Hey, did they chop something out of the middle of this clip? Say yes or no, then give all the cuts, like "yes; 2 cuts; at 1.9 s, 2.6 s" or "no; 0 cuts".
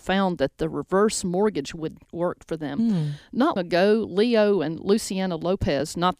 yes; 2 cuts; at 2.0 s, 3.6 s